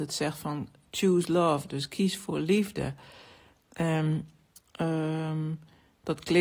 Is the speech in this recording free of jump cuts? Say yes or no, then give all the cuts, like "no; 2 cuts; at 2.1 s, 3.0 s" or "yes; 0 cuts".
yes; 0 cuts